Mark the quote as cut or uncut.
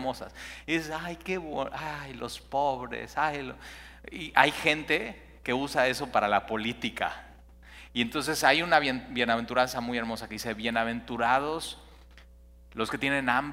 uncut